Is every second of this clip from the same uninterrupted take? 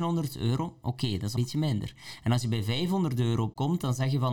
no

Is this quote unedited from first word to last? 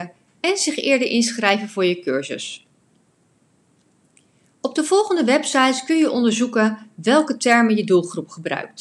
yes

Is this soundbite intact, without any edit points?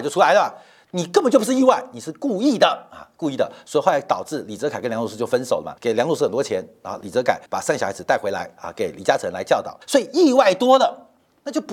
no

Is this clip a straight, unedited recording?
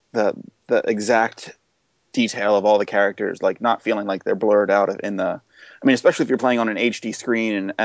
yes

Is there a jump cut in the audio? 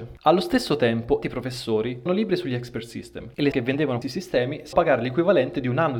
yes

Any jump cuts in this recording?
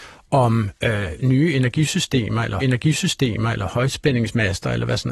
yes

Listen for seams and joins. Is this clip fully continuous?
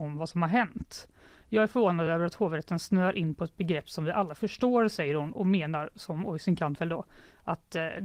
yes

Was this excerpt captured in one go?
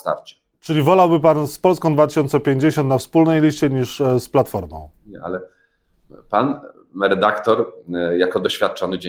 no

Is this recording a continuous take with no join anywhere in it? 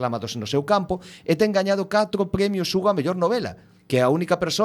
yes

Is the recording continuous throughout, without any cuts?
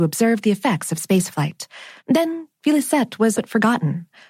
no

